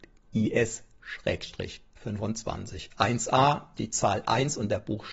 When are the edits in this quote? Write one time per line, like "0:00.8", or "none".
0:03.8